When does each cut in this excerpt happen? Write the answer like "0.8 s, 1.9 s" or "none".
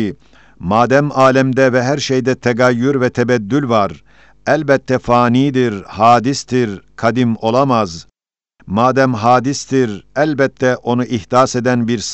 none